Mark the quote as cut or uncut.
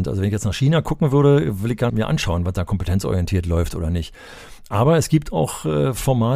cut